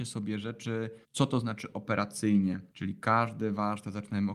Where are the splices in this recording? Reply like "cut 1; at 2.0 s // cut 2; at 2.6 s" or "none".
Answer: cut 1; at 1.0 s // cut 2; at 2.7 s

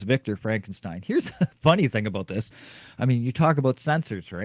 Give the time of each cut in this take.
none

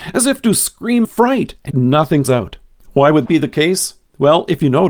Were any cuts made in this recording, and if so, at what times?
cut 1; at 1.0 s // cut 2; at 1.7 s // cut 3; at 2.2 s // cut 4; at 3.3 s

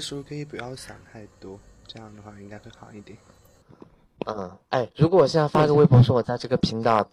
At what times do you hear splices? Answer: cut 1; at 4.9 s

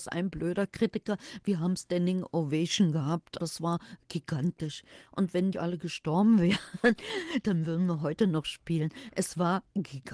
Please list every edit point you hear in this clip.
cut 1; at 3.4 s // cut 2; at 5.5 s

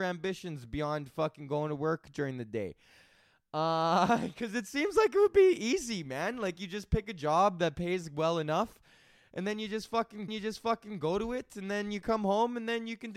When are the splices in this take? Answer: cut 1; at 10.3 s

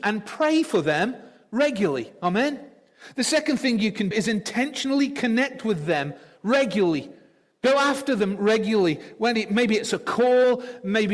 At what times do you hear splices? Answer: cut 1; at 4.1 s

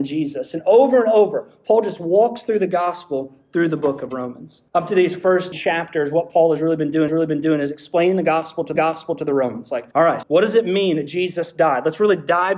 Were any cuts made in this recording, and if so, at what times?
cut 1; at 4.7 s // cut 2; at 5.5 s // cut 3; at 7.1 s // cut 4; at 8.7 s // cut 5; at 9.9 s // cut 6; at 10.2 s

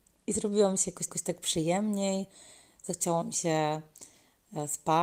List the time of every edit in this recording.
cut 1; at 1.1 s

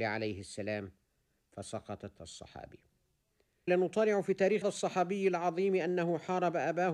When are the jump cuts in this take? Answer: cut 1; at 2.2 s // cut 2; at 3.7 s // cut 3; at 4.6 s

